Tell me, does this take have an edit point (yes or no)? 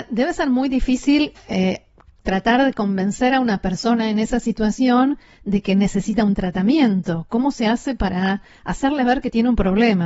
no